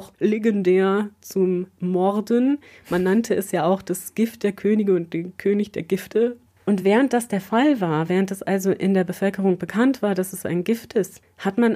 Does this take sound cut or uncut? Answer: uncut